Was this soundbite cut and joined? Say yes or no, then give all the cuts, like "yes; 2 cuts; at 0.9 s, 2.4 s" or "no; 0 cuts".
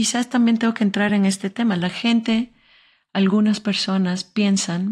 no; 0 cuts